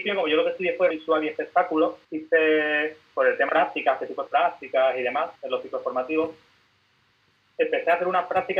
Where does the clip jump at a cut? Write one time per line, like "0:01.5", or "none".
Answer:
0:00.9
0:02.0
0:03.5
0:04.3
0:05.4